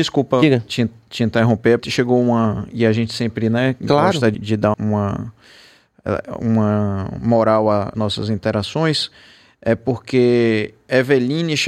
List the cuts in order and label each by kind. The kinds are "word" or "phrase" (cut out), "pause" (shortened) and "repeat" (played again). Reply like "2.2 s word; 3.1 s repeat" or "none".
1.8 s word; 4.3 s word; 4.7 s word; 7.9 s word